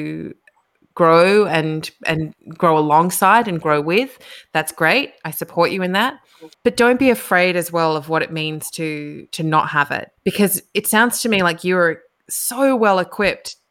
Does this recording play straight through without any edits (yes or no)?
no